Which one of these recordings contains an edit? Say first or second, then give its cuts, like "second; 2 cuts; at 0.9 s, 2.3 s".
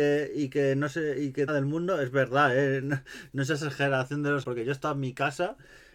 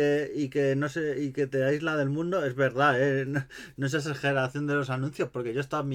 first; 2 cuts; at 1.5 s, 4.4 s